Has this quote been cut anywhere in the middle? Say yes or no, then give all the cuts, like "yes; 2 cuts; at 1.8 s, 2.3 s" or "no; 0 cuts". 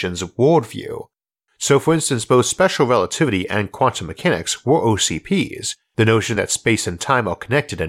no; 0 cuts